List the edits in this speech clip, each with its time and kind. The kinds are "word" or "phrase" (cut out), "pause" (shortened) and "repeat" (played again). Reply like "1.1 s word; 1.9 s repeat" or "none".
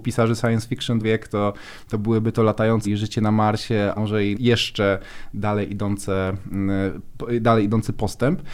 1.0 s word; 2.8 s word; 4.0 s word; 4.3 s word